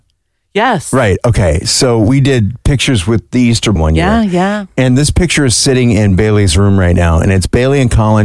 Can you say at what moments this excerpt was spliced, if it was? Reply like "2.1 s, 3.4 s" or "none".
3.8 s